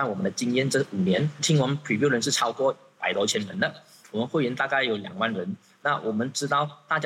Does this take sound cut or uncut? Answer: uncut